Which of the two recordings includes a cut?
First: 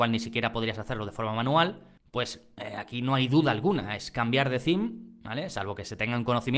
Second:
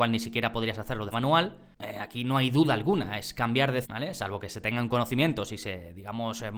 second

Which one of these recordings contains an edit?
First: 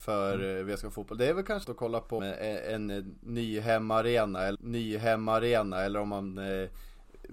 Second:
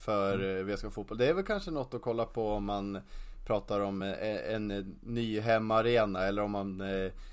first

